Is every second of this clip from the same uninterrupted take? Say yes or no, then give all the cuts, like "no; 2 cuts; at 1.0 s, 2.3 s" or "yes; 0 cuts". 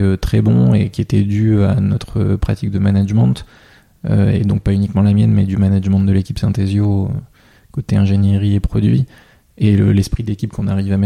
yes; 0 cuts